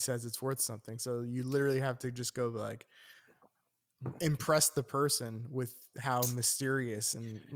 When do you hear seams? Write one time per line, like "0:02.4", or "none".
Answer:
none